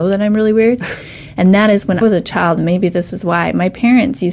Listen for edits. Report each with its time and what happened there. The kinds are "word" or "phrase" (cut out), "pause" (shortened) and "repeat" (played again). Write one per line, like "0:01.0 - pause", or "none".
0:02.0 - word